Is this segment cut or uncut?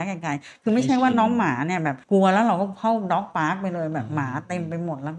cut